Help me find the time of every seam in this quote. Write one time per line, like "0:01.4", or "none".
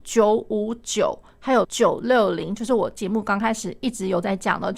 0:01.6